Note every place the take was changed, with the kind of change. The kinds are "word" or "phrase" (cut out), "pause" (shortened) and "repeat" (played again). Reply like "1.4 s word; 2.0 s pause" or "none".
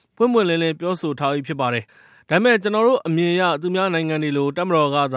1.9 s pause